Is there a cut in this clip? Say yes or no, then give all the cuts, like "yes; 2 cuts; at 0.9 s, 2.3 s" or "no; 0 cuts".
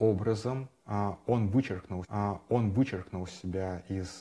yes; 1 cut; at 2.0 s